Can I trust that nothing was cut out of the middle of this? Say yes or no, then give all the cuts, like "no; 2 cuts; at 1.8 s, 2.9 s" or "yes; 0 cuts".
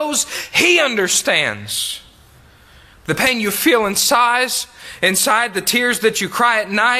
yes; 0 cuts